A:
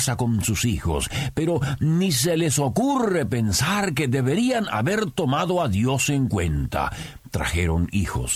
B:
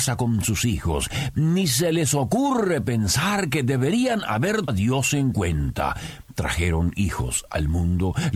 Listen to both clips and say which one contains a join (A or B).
B